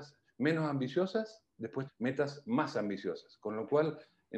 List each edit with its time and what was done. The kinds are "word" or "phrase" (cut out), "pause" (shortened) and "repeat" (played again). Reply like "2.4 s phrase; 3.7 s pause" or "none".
1.9 s phrase